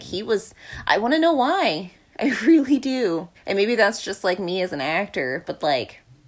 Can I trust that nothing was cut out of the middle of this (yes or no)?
no